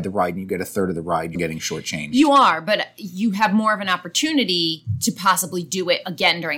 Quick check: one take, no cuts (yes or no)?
no